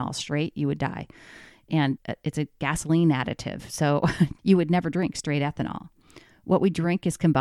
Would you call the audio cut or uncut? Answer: cut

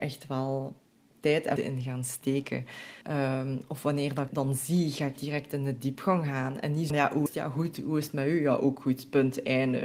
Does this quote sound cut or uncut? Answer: cut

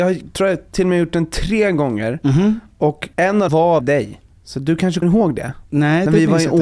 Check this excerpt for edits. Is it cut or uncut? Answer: cut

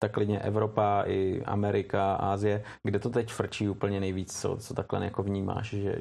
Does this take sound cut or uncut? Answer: uncut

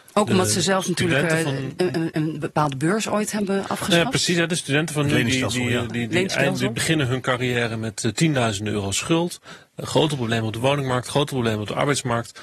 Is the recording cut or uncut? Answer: uncut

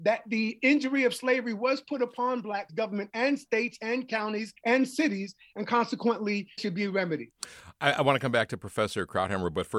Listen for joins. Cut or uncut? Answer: cut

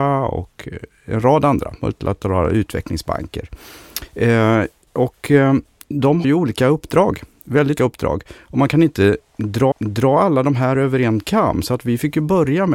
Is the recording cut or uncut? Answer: cut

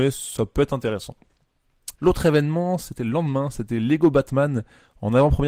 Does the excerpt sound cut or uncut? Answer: cut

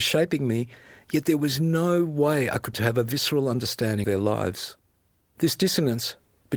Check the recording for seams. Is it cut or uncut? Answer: cut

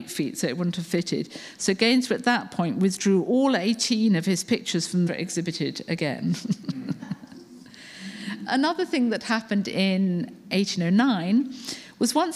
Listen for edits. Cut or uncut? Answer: cut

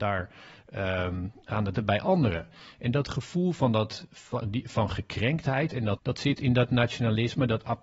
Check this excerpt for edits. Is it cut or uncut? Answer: cut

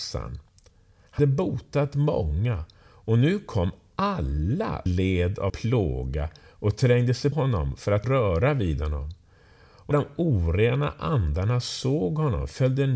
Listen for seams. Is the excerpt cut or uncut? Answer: cut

